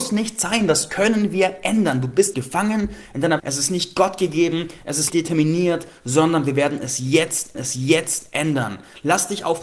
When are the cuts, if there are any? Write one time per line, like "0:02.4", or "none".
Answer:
0:02.3
0:03.4
0:05.1
0:07.5